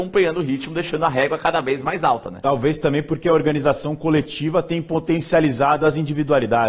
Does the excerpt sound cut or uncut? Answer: uncut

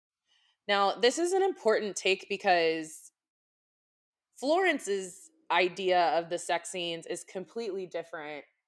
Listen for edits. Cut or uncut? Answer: uncut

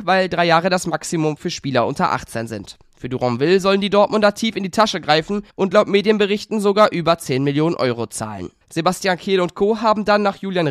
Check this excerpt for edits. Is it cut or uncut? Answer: cut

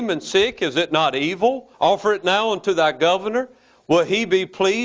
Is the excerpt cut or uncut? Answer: cut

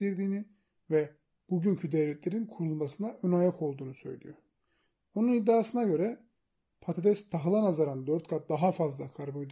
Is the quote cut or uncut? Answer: uncut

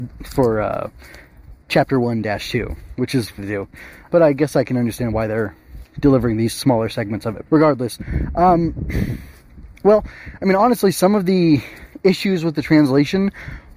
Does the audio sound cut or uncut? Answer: cut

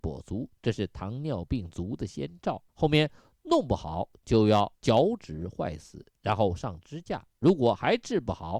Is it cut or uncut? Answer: cut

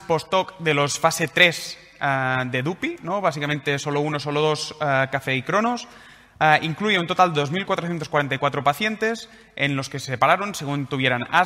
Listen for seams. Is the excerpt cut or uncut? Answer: uncut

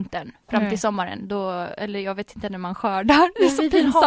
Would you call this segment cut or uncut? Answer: uncut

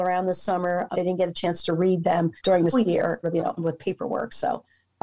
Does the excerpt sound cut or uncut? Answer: cut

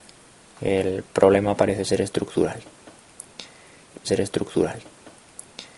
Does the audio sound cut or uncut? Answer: cut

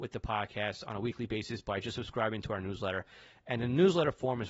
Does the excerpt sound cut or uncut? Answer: uncut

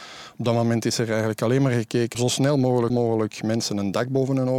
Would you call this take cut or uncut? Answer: cut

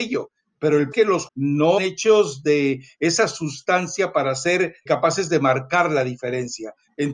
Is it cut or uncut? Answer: cut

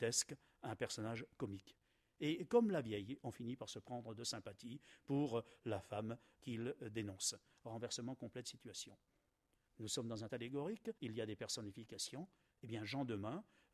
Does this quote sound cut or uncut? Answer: cut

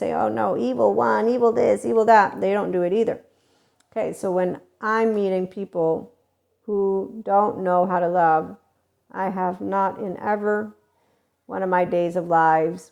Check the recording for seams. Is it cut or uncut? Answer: uncut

